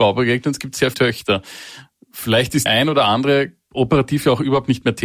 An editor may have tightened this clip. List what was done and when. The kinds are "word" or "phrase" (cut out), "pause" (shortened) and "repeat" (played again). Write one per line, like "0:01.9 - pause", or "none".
0:00.9 - word
0:02.7 - word